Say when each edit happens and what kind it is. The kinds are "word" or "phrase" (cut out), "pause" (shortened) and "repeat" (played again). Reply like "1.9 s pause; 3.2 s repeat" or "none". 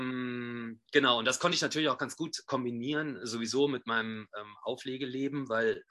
none